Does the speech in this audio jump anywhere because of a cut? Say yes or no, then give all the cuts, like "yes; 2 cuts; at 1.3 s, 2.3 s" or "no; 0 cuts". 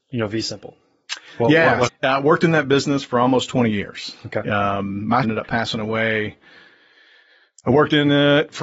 yes; 2 cuts; at 1.9 s, 5.2 s